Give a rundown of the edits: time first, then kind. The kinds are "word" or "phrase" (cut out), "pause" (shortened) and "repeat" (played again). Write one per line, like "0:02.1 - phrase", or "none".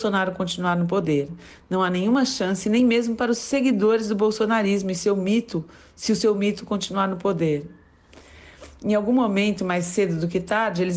none